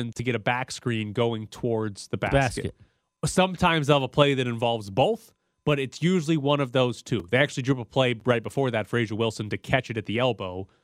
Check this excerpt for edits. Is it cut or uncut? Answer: uncut